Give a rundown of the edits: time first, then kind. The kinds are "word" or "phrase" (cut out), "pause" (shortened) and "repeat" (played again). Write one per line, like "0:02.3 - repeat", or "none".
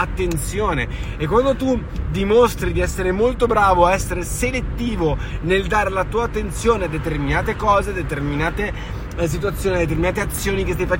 none